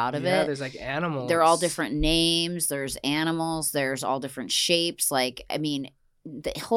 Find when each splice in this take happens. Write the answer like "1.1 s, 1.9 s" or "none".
none